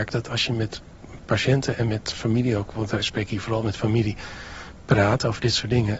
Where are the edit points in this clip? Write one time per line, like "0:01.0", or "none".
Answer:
none